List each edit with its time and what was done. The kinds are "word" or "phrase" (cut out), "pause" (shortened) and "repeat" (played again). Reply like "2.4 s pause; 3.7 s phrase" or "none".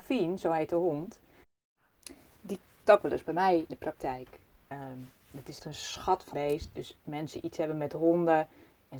2.8 s word; 3.7 s word; 5.6 s word; 6.3 s word; 7.0 s word